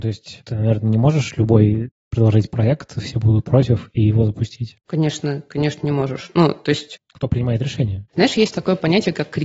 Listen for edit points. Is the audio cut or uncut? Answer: uncut